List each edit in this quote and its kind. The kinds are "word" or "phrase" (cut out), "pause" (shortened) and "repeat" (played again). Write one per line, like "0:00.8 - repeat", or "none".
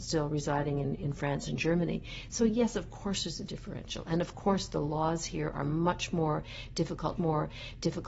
0:07.2 - repeat